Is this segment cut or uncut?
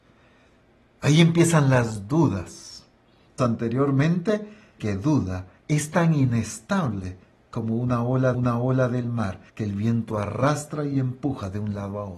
cut